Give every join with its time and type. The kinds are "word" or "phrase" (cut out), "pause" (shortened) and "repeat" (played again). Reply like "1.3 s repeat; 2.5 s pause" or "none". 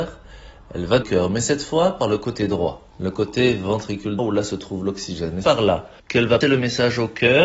1.0 s phrase; 2.9 s pause; 4.2 s word; 5.4 s word; 6.0 s pause; 6.4 s word